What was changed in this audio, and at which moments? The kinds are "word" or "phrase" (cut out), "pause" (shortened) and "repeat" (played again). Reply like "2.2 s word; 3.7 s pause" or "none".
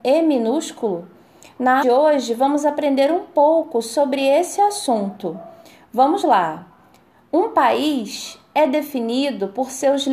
1.8 s phrase